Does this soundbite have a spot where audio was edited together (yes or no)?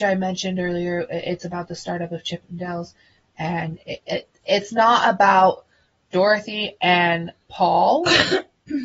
no